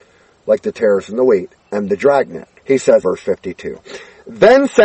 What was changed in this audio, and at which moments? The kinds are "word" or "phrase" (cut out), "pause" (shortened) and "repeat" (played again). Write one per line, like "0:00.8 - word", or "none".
0:01.6 - pause
0:02.6 - pause
0:03.0 - word